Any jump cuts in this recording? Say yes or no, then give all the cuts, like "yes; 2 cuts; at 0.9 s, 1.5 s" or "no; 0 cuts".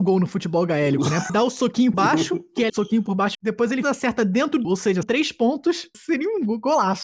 yes; 8 cuts; at 1.3 s, 1.9 s, 2.7 s, 3.3 s, 3.8 s, 4.6 s, 5.0 s, 5.9 s